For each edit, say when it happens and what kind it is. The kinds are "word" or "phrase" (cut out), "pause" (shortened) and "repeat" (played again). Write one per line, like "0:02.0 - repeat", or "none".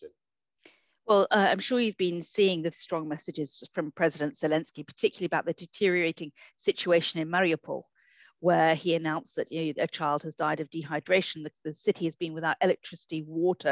0:02.7 - word